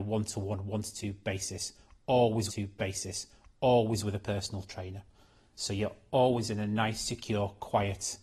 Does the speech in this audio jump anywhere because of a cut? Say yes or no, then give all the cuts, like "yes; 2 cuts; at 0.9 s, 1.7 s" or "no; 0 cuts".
yes; 1 cut; at 2.5 s